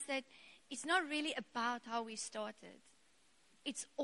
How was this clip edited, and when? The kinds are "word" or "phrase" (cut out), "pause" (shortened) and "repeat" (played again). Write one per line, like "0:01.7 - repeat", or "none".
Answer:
none